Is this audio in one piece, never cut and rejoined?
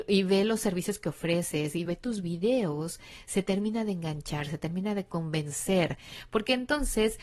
no; 1 cut; at 1.9 s

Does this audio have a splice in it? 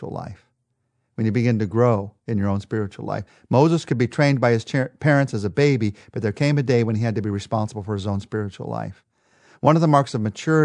no; 0 cuts

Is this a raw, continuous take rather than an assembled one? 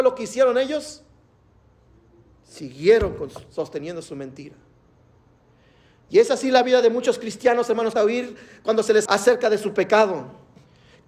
no; 2 cuts; at 8.0 s, 9.1 s

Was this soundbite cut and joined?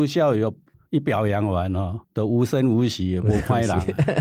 yes; 1 cut; at 2.0 s

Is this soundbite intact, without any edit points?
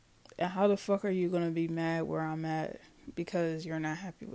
yes; 0 cuts

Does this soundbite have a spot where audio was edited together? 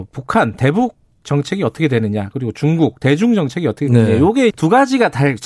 yes; 1 cut; at 4.5 s

